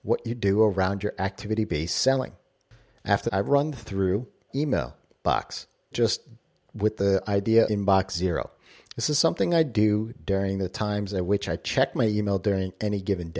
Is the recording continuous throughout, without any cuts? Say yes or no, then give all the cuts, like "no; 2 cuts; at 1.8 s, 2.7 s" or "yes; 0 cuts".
no; 4 cuts; at 3.3 s, 4.5 s, 5.9 s, 7.6 s